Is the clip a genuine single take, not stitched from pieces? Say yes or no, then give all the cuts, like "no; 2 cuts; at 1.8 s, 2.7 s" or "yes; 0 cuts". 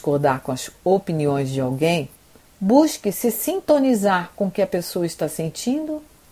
yes; 0 cuts